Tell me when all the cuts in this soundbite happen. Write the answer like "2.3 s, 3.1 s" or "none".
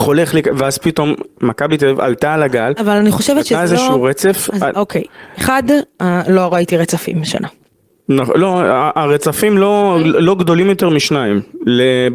none

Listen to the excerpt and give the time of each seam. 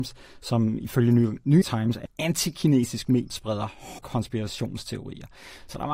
1.6 s, 2.1 s, 3.3 s, 4.0 s

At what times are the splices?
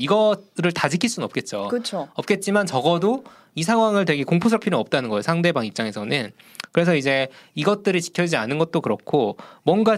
4.6 s

